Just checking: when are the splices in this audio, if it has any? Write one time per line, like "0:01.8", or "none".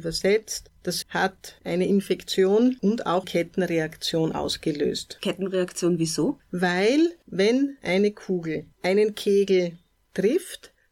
0:01.0
0:03.2

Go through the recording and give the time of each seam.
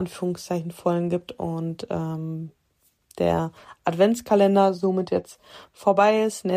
none

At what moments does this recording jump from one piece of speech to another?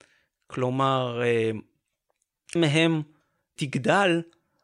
0:02.6

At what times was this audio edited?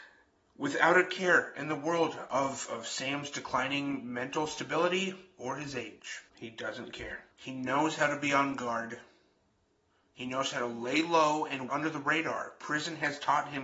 0:06.3
0:07.3
0:11.7

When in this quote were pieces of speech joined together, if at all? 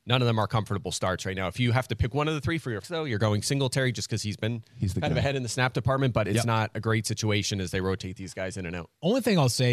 0:02.8

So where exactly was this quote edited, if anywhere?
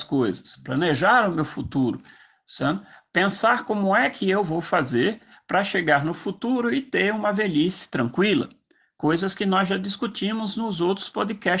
none

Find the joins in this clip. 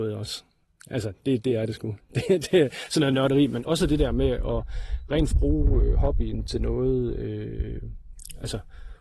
0:03.7
0:05.3

